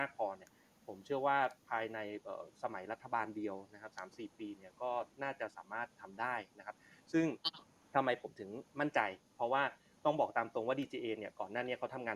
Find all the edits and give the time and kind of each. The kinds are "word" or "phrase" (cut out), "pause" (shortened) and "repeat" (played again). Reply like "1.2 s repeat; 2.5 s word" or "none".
8.7 s pause